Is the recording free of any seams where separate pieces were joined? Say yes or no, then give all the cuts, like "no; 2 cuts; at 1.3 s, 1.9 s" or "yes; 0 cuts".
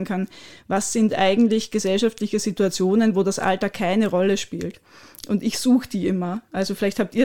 yes; 0 cuts